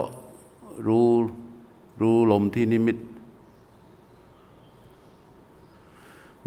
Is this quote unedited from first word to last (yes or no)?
yes